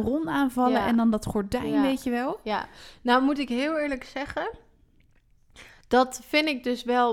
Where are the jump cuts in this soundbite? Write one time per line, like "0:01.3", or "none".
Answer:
none

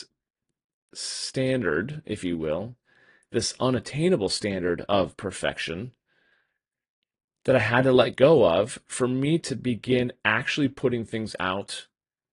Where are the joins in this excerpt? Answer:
none

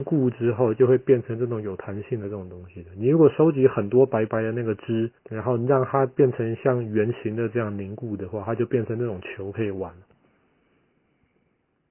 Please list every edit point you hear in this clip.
0:05.2

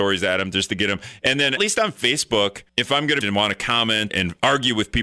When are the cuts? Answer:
0:01.6
0:02.7
0:03.2
0:04.1

